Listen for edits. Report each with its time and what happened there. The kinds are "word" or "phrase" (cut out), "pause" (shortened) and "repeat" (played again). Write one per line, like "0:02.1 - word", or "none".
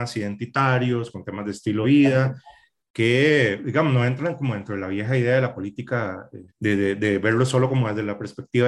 0:01.8 - word
0:06.5 - pause